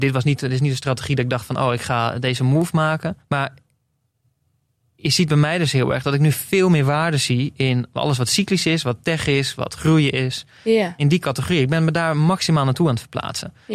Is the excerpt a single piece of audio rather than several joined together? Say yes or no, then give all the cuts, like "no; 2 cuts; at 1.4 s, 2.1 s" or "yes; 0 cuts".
no; 1 cut; at 3.2 s